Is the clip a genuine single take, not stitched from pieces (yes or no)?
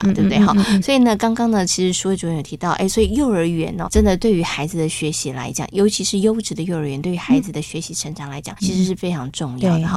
no